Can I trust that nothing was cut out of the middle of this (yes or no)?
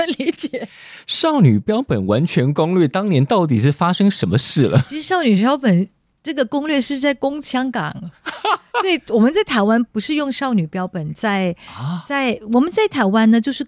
yes